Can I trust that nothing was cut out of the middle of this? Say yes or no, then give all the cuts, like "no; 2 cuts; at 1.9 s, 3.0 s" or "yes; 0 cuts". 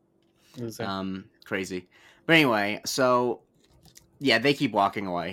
no; 2 cuts; at 1.4 s, 2.8 s